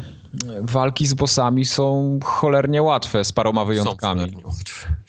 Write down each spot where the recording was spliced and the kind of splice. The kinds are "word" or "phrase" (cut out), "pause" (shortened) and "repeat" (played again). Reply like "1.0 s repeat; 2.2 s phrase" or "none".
none